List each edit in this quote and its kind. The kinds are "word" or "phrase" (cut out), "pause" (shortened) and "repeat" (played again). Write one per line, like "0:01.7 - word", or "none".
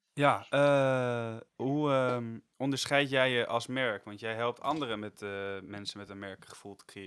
0:01.5 - pause
0:02.5 - pause